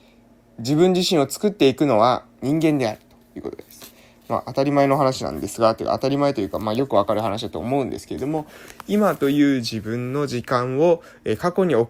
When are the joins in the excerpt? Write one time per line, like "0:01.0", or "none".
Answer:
none